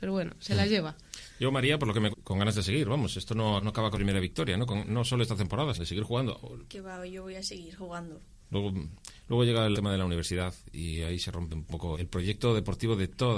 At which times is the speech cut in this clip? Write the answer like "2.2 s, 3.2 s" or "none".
2.1 s, 3.6 s, 3.9 s, 5.8 s, 9.7 s, 11.9 s